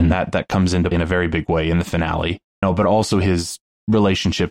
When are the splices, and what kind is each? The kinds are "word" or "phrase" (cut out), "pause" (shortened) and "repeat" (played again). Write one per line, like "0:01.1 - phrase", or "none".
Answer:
0:00.9 - word
0:02.6 - word